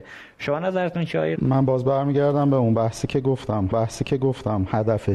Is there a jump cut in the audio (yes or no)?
yes